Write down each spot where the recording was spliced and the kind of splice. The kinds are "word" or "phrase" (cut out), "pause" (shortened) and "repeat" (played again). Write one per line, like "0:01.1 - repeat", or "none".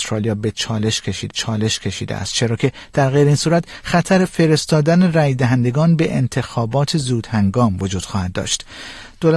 0:01.3 - repeat